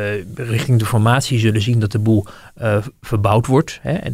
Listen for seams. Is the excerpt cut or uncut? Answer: uncut